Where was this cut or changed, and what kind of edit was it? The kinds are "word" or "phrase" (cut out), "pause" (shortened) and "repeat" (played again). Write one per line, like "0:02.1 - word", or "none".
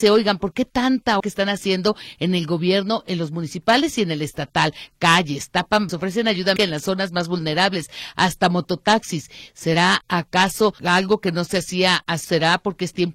0:01.2 - word
0:05.9 - word
0:06.6 - word
0:10.8 - pause
0:12.2 - phrase